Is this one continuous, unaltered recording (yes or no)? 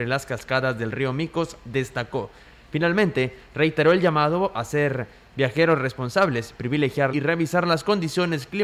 no